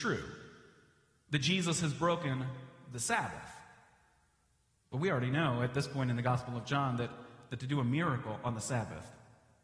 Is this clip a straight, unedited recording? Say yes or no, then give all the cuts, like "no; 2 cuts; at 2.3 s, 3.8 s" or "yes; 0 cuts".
yes; 0 cuts